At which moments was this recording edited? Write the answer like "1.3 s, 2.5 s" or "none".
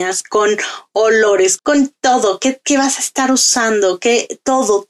1.6 s